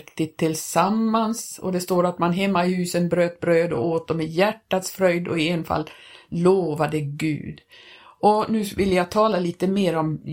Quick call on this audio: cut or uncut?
uncut